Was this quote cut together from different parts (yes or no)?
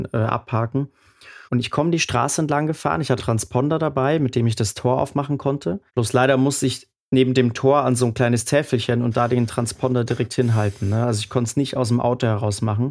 yes